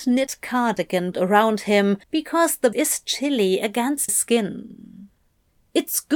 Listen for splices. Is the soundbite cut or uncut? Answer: cut